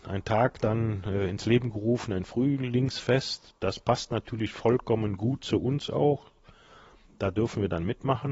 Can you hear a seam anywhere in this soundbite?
no; 0 cuts

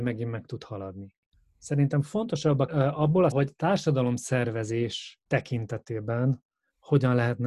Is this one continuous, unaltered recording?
no; 4 cuts; at 1.3 s, 2.7 s, 3.3 s, 5.3 s

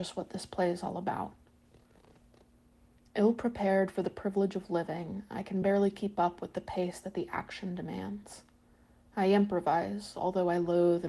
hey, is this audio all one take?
yes; 0 cuts

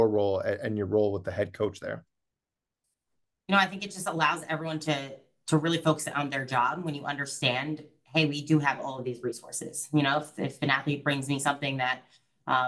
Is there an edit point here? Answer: no; 0 cuts

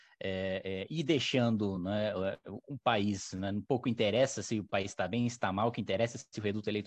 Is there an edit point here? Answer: no; 0 cuts

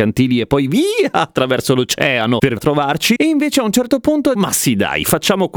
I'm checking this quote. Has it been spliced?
yes; 2 cuts; at 2.6 s, 4.3 s

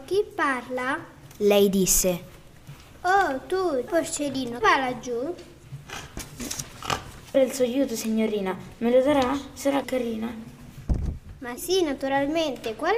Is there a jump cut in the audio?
yes; 5 cuts; at 3.9 s, 4.6 s, 7.3 s, 9.8 s, 11.6 s

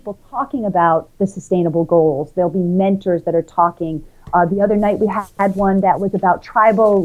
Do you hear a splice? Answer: no; 0 cuts

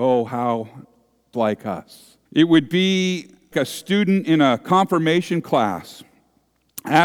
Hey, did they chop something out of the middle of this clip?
yes; 3 cuts; at 1.3 s, 2.3 s, 3.5 s

